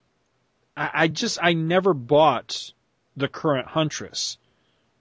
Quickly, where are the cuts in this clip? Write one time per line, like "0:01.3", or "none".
none